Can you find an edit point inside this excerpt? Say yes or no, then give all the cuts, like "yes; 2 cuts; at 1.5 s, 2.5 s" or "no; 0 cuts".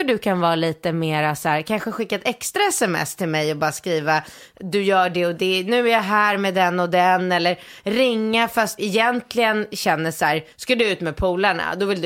yes; 2 cuts; at 8.8 s, 10.5 s